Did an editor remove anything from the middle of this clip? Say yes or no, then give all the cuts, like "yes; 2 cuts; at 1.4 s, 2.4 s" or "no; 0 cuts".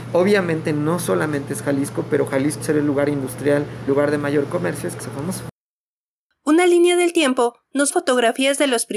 yes; 4 cuts; at 2.6 s, 3.9 s, 5.0 s, 7.9 s